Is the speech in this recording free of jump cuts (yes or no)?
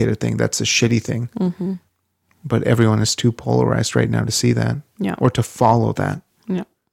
yes